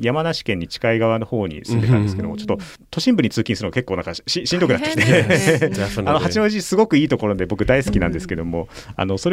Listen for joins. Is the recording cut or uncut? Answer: uncut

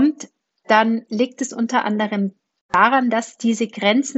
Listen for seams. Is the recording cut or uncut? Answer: uncut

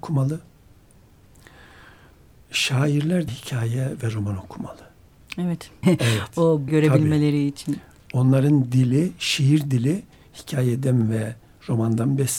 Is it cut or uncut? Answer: cut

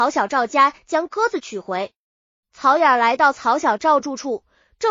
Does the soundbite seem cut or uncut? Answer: uncut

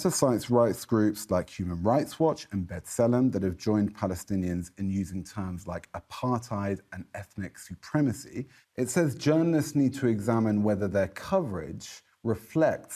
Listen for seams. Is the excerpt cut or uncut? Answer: uncut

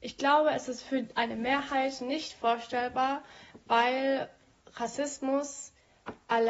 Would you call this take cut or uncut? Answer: uncut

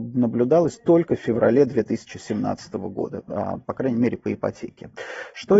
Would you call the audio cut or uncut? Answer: uncut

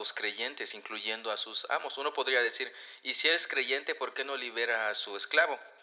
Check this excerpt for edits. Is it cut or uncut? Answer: uncut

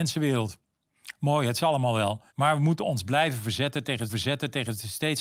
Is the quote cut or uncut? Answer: cut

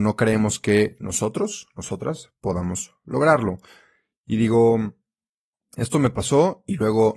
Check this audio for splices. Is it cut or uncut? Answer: uncut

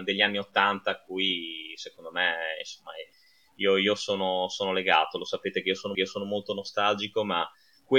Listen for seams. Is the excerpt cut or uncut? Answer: cut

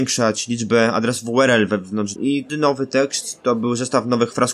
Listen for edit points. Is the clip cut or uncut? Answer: cut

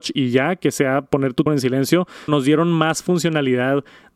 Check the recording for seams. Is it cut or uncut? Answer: cut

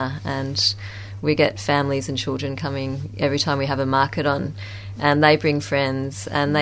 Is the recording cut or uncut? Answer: uncut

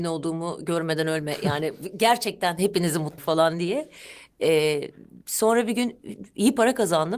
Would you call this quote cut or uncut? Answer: cut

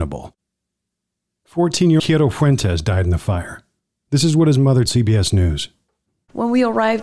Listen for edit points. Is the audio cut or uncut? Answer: cut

